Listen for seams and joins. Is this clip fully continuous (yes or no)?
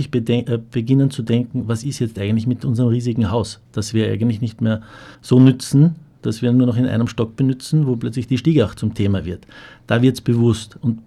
no